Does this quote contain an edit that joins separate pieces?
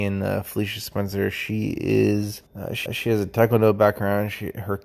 yes; 2 cuts; at 2.5 s, 2.9 s

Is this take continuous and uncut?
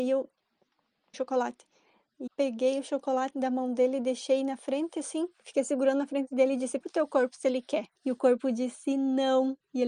no; 5 cuts; at 1.1 s, 2.3 s, 3.3 s, 6.8 s, 8.0 s

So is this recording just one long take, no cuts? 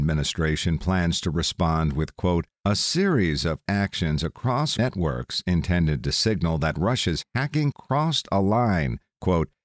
no; 3 cuts; at 3.7 s, 4.8 s, 7.7 s

